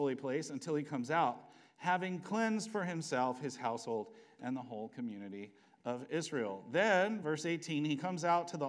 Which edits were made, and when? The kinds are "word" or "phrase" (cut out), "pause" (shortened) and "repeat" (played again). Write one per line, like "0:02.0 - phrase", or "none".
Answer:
none